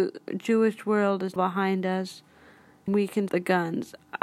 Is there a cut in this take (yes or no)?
yes